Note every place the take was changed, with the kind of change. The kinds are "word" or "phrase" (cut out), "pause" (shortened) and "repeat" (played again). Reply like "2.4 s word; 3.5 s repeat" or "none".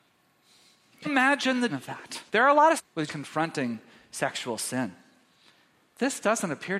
1.1 s word; 1.7 s word; 2.3 s pause; 2.8 s word; 3.1 s word